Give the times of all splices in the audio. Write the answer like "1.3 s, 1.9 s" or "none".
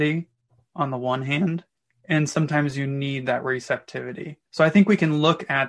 1.8 s, 4.5 s

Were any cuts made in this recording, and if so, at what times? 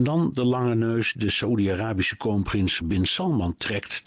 1.1 s, 2.8 s

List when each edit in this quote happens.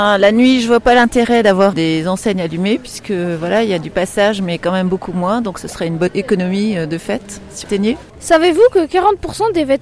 1.7 s, 7.6 s

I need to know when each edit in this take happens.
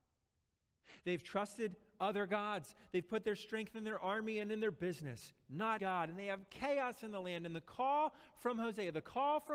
5.8 s

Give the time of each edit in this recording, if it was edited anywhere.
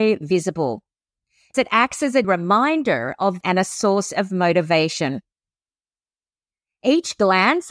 1.5 s, 2.2 s, 3.4 s

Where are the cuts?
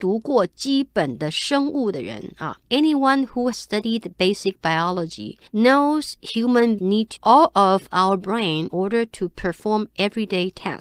2.6 s, 3.5 s, 5.5 s, 6.8 s, 7.2 s, 8.7 s

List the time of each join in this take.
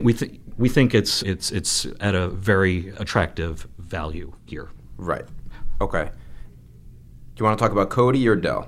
1.2 s, 2.9 s

